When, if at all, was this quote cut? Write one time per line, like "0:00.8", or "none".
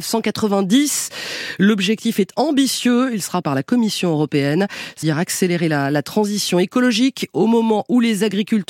0:03.4
0:05.0